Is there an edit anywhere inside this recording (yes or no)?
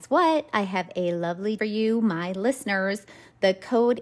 yes